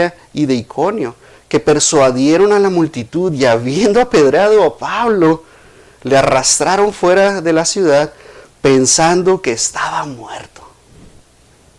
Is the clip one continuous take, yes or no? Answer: yes